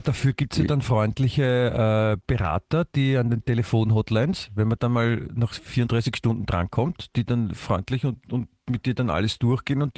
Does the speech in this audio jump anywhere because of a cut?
no; 0 cuts

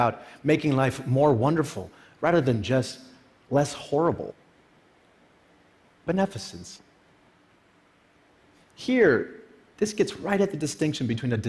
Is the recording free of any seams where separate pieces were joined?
yes; 0 cuts

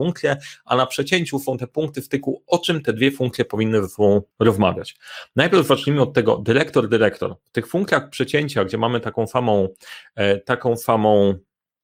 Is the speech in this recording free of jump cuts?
no; 1 cut; at 4.3 s

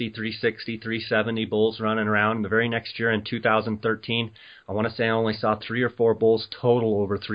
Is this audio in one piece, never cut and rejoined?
yes; 0 cuts

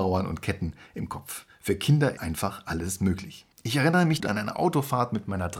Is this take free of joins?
no; 3 cuts; at 2.2 s, 3.5 s, 4.2 s

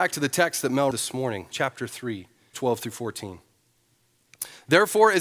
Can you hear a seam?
yes; 3 cuts; at 0.9 s, 1.5 s, 2.5 s

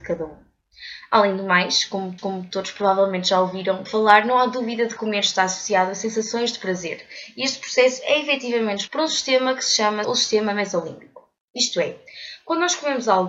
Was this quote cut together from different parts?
yes; 5 cuts; at 2.2 s, 3.9 s, 5.0 s, 8.9 s, 10.0 s

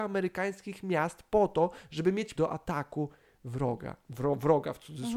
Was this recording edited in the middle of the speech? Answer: yes; 1 cut; at 2.4 s

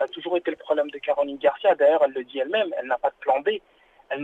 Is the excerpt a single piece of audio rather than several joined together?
yes; 0 cuts

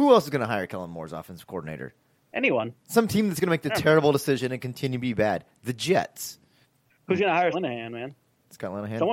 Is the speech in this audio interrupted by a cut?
yes; 3 cuts; at 2.2 s, 6.6 s, 7.5 s

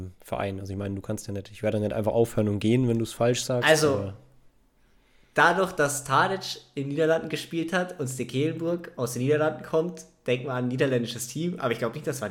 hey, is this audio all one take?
yes; 0 cuts

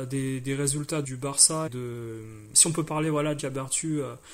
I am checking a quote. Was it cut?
yes; 3 cuts; at 1.0 s, 1.7 s, 3.4 s

